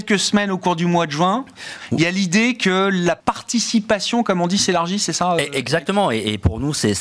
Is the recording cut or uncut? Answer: cut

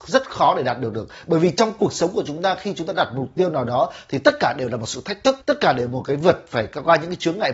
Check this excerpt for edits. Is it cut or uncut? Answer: cut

